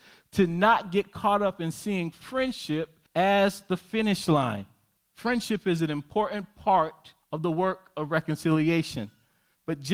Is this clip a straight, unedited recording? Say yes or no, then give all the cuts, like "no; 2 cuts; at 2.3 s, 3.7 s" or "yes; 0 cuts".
no; 3 cuts; at 3.1 s, 5.0 s, 7.2 s